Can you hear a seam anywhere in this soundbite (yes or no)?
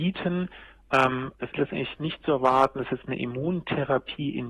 yes